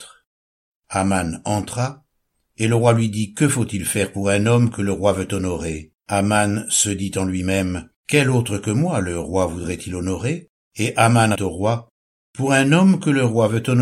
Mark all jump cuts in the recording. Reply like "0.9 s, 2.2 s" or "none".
6.0 s, 8.0 s, 10.5 s, 11.3 s